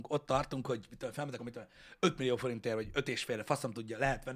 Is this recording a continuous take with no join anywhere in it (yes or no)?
no